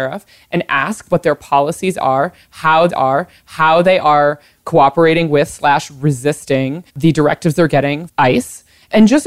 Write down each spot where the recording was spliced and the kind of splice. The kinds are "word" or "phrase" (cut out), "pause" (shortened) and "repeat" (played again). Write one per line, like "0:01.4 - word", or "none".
0:02.9 - repeat
0:06.9 - pause
0:08.1 - word